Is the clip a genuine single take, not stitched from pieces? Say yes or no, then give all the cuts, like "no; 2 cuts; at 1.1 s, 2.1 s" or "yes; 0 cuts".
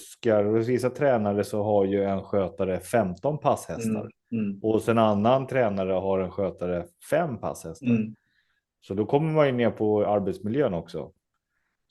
yes; 0 cuts